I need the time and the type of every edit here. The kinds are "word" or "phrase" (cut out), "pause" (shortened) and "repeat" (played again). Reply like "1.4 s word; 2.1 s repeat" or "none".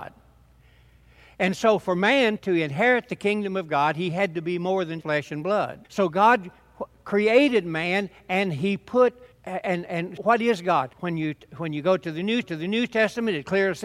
2.4 s word; 5.0 s word; 5.8 s pause; 9.3 s pause; 10.2 s word; 10.9 s pause; 12.4 s repeat